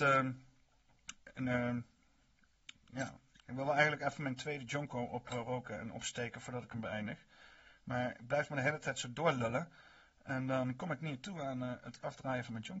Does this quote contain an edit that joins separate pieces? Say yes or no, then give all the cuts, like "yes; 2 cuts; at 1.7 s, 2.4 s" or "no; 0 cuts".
no; 0 cuts